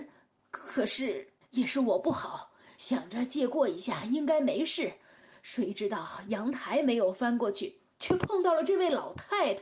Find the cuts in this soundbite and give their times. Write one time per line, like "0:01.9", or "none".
0:01.4